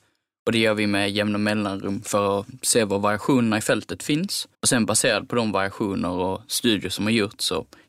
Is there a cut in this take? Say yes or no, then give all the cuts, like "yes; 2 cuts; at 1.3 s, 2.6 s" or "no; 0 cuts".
yes; 1 cut; at 4.5 s